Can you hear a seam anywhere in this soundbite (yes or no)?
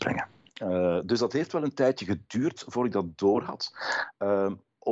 no